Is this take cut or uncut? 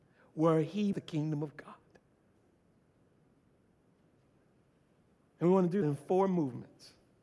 cut